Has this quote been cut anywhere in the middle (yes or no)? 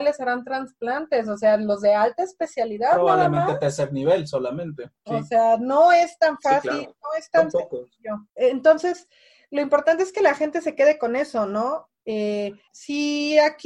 yes